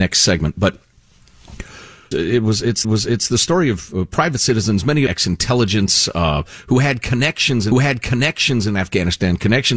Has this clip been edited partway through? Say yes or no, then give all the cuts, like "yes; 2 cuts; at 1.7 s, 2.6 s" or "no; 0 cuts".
yes; 4 cuts; at 2.1 s, 2.8 s, 5.1 s, 7.7 s